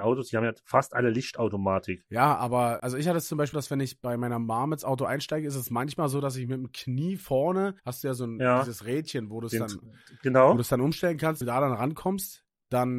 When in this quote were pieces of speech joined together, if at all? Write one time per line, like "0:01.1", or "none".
0:02.8
0:03.5
0:07.8
0:11.4